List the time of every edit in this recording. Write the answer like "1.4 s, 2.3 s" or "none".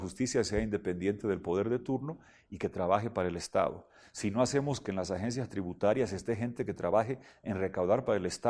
none